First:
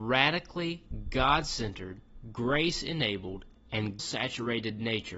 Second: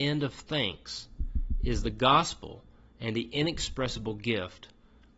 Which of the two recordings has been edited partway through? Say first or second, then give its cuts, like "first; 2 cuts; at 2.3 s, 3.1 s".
first; 1 cut; at 4.0 s